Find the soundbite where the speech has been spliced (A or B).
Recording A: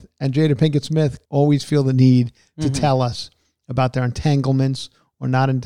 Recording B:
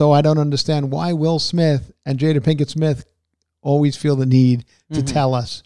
A